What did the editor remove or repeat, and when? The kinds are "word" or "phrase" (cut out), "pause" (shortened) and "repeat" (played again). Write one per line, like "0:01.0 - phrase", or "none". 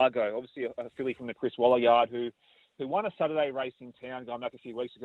none